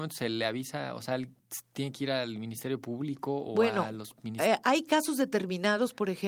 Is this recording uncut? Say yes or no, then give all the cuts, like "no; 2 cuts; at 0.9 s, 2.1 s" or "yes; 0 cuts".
yes; 0 cuts